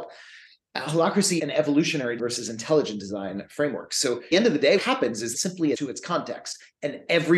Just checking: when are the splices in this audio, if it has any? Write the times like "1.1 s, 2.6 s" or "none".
1.4 s, 2.2 s, 4.3 s, 4.8 s, 5.3 s, 5.7 s